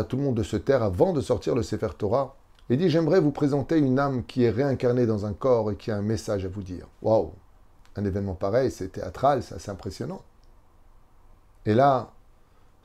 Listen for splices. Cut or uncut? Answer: cut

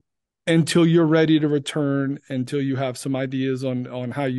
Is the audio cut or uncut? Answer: uncut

